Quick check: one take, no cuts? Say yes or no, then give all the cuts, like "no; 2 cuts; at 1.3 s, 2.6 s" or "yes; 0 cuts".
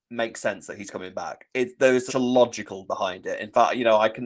no; 2 cuts; at 2.1 s, 2.9 s